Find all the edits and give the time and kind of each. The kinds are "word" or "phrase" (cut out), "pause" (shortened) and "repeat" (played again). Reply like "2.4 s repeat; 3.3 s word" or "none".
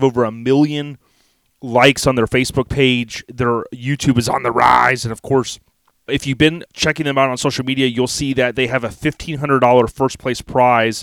6.1 s word; 6.7 s word